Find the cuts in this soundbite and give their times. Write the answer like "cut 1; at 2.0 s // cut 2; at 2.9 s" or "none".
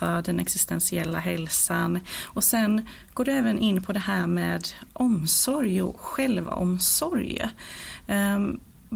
none